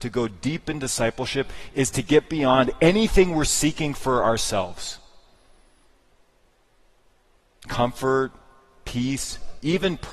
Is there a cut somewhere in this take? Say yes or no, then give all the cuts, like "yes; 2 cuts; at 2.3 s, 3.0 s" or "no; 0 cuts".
no; 0 cuts